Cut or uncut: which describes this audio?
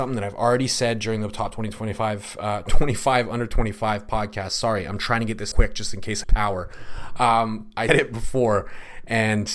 cut